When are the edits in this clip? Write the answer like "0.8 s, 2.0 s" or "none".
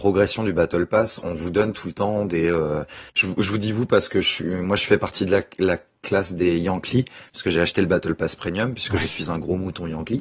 none